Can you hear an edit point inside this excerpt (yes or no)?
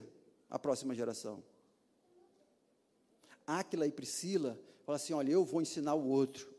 no